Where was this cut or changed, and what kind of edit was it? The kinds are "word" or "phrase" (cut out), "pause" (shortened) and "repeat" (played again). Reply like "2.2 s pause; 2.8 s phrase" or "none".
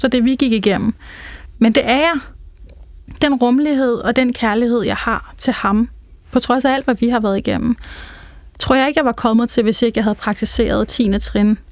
none